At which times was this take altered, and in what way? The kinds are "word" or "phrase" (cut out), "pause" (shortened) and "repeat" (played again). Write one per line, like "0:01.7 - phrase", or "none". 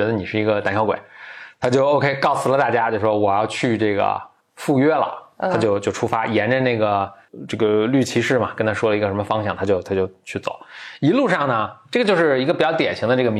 none

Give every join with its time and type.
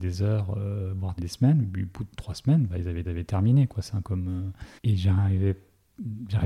0:01.2 - word
0:03.0 - repeat
0:04.0 - word
0:04.8 - pause

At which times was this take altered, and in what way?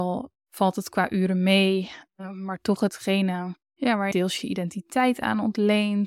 0:02.1 - pause
0:04.1 - word

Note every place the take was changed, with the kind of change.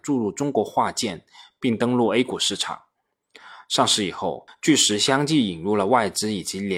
none

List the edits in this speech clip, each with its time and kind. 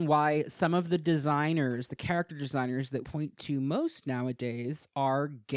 0:03.0 - word

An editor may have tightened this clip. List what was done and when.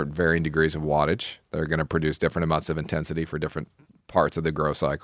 none

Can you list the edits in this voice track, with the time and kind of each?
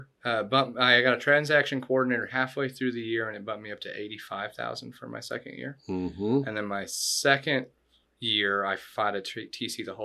none

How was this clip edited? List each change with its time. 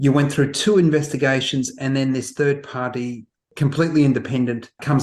none

